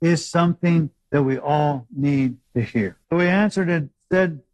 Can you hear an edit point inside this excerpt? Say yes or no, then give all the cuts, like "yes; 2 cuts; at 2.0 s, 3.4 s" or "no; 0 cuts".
yes; 2 cuts; at 2.4 s, 3.0 s